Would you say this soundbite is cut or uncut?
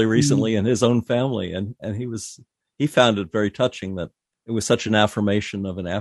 uncut